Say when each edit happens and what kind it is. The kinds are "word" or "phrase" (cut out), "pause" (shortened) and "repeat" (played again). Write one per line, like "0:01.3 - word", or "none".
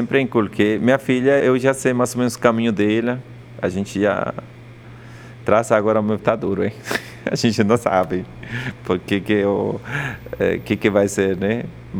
0:01.4 - word
0:06.2 - word